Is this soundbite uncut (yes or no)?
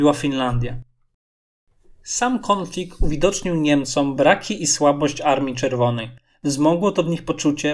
yes